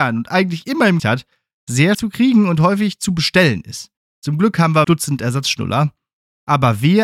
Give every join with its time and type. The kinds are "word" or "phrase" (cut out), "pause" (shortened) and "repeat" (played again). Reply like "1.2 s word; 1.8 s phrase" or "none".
1.0 s word; 1.9 s word; 4.0 s pause; 4.8 s phrase